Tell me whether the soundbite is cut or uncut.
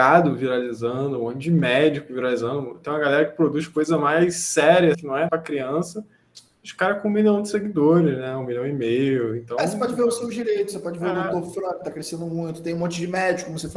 cut